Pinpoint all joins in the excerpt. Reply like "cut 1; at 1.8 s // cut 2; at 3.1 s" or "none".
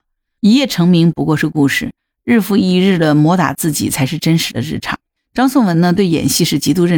none